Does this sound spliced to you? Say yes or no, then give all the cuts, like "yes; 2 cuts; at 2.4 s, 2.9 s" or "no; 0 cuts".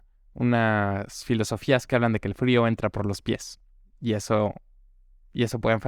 no; 0 cuts